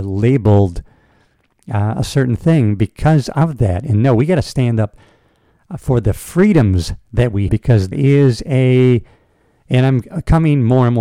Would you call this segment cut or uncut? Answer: cut